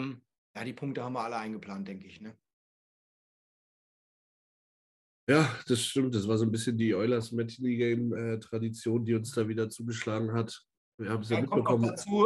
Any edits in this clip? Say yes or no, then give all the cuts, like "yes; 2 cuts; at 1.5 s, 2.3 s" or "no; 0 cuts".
no; 0 cuts